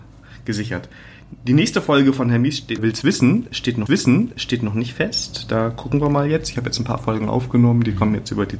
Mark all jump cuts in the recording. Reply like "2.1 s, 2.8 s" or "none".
2.8 s, 3.9 s